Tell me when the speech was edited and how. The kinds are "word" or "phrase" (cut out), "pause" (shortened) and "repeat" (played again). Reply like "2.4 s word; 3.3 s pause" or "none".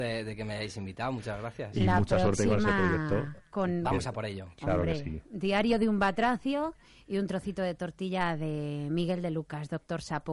none